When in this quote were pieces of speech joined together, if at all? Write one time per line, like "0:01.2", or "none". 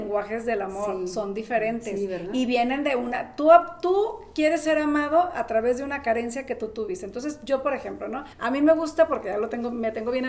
0:08.3